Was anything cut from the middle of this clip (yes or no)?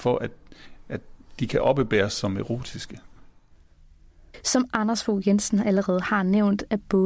no